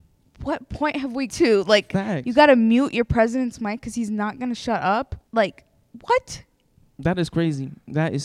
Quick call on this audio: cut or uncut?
cut